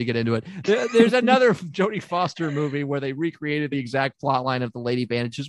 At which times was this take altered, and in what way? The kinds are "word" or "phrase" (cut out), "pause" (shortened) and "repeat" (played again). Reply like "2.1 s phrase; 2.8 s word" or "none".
none

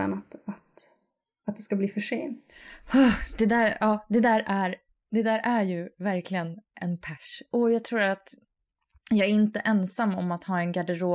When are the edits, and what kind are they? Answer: none

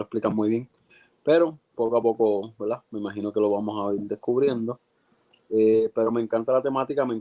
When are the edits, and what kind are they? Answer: none

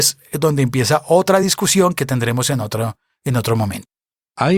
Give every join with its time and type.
none

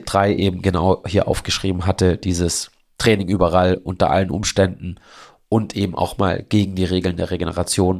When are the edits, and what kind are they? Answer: none

